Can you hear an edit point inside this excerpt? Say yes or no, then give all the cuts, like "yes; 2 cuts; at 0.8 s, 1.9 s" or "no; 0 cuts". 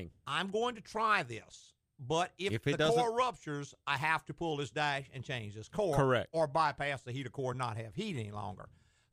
no; 0 cuts